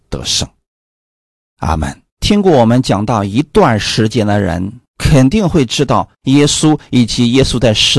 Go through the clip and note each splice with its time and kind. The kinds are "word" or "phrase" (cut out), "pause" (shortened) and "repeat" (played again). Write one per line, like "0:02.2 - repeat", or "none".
0:02.1 - pause
0:04.9 - pause
0:06.1 - pause